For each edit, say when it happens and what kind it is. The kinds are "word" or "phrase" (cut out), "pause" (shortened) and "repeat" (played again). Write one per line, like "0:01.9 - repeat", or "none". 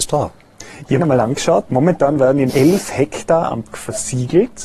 0:01.0 - phrase
0:02.5 - word
0:03.7 - word